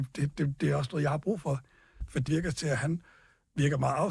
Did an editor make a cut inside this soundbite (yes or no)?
yes